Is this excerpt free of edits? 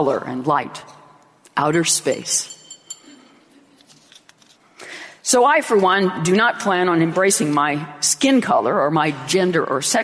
yes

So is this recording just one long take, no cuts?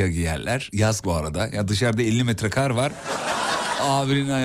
no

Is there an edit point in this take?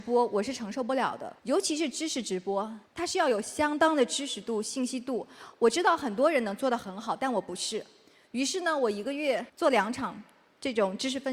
yes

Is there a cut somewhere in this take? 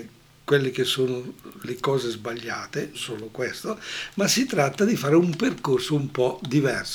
yes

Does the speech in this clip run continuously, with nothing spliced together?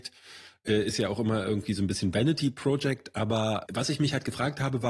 yes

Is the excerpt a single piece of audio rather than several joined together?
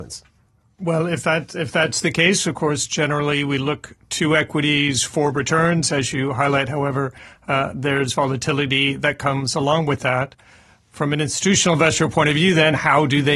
yes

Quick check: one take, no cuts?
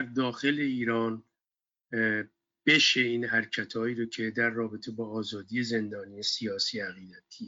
yes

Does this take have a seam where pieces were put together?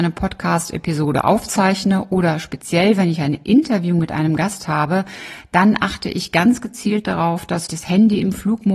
yes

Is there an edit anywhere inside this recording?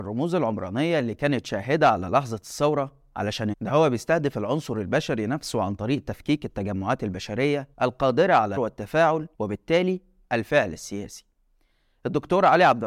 yes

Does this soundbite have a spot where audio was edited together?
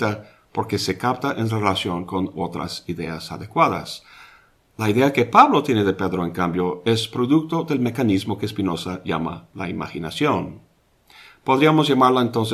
no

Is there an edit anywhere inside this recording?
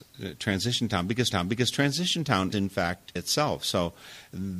yes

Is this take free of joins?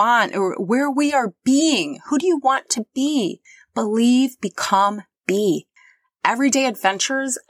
yes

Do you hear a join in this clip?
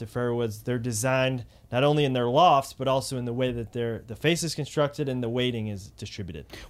no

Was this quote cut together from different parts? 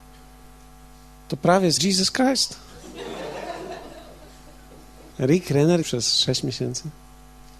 yes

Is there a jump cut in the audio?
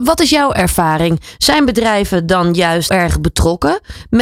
yes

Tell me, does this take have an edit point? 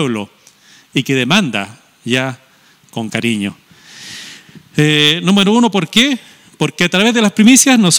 no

